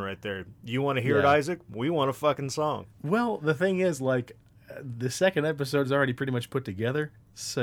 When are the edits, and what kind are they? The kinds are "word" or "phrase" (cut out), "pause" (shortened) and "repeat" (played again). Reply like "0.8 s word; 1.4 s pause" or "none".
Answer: 2.9 s pause